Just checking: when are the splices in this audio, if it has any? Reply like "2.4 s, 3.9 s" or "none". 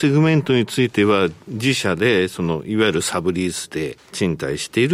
none